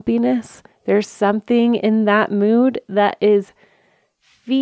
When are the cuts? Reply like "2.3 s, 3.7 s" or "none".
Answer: none